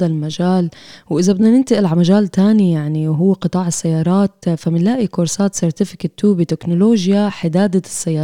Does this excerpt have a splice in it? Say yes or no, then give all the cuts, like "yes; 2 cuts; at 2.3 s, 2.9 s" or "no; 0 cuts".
no; 0 cuts